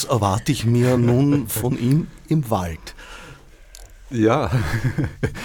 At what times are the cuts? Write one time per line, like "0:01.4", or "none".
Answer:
none